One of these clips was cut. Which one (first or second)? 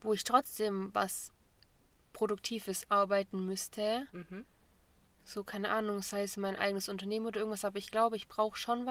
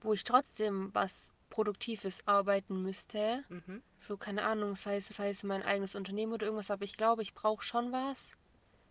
second